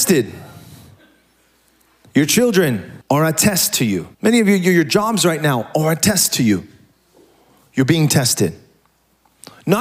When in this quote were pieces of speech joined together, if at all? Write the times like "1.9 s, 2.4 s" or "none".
3.0 s, 4.1 s